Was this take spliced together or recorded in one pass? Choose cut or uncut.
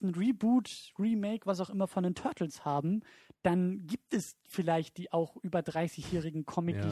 uncut